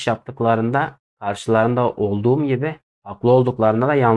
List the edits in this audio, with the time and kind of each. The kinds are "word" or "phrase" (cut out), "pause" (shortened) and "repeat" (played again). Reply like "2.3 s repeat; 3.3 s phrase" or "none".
none